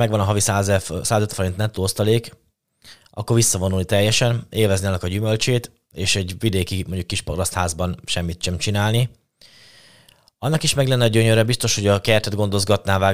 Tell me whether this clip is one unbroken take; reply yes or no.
no